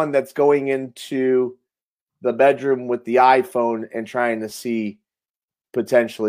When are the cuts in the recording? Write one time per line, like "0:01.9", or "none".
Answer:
none